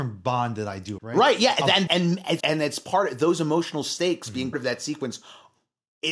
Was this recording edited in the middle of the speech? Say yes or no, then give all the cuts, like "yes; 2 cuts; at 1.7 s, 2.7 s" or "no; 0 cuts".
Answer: yes; 4 cuts; at 1.0 s, 1.9 s, 2.4 s, 4.5 s